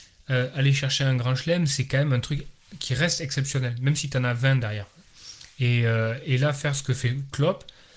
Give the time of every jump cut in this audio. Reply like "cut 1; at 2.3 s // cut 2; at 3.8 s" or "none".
none

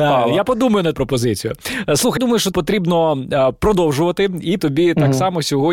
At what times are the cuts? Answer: cut 1; at 0.9 s // cut 2; at 2.2 s // cut 3; at 2.5 s // cut 4; at 4.6 s

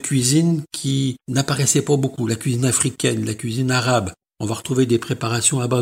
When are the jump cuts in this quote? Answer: cut 1; at 1.2 s

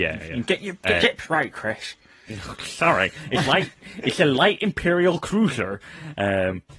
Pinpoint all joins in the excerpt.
cut 1; at 1.0 s // cut 2; at 3.5 s

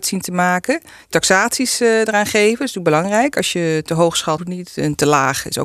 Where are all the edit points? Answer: cut 1; at 1.1 s // cut 2; at 4.4 s

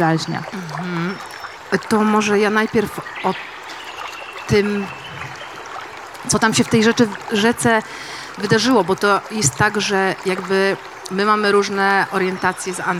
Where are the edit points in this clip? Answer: none

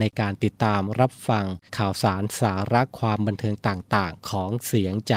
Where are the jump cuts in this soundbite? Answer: cut 1; at 1.7 s

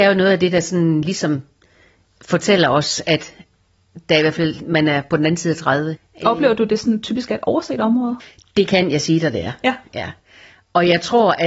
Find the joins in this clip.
none

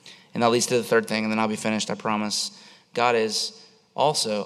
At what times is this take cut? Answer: none

